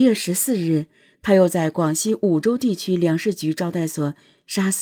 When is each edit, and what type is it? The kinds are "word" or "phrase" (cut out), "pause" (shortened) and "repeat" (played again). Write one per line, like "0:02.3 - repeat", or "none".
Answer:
none